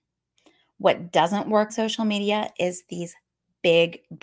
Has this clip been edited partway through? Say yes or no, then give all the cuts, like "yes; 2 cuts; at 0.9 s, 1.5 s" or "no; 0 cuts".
yes; 1 cut; at 1.7 s